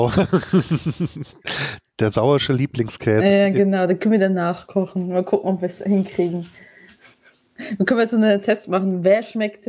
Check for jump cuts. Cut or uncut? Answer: uncut